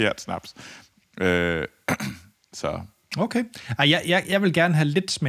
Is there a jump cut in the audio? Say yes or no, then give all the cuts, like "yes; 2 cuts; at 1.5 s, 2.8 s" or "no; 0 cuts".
no; 0 cuts